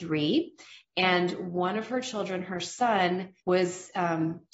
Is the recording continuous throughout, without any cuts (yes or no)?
no